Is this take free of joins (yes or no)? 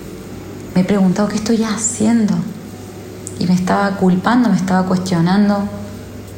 yes